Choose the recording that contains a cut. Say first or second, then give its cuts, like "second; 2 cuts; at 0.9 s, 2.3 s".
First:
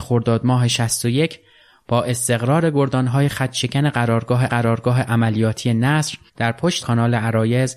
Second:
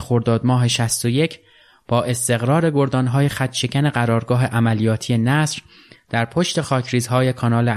first; 3 cuts; at 4.5 s, 6.3 s, 6.8 s